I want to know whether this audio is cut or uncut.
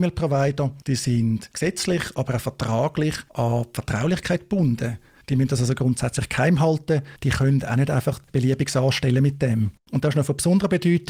uncut